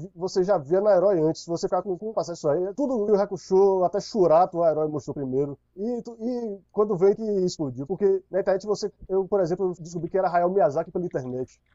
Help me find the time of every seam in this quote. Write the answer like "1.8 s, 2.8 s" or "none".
2.1 s, 3.1 s, 7.2 s